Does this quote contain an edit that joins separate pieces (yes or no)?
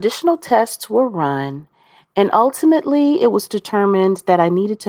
no